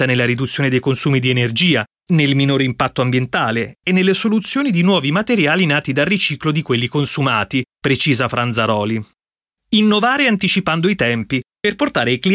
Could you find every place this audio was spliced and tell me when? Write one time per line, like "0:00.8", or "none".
none